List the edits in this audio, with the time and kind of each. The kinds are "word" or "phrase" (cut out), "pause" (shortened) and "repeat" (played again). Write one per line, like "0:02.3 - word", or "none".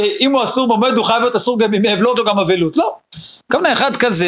0:02.2 - word